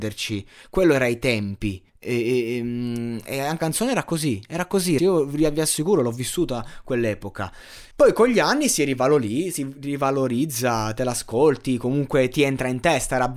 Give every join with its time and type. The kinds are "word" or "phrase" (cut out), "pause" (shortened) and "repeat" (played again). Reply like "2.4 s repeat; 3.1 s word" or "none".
1.9 s pause; 3.6 s word; 5.0 s word; 7.9 s pause